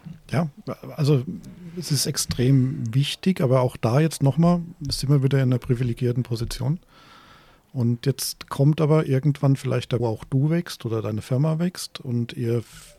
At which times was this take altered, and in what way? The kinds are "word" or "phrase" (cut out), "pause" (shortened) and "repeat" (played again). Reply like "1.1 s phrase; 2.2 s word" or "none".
10.0 s phrase